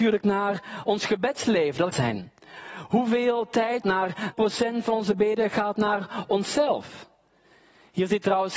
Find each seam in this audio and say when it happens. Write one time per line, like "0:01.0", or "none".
0:01.9
0:03.8
0:04.3